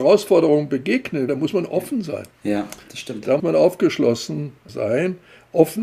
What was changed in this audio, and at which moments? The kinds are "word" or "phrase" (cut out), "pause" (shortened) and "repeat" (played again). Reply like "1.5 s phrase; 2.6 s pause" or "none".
1.3 s word; 2.3 s pause; 3.4 s word; 4.7 s word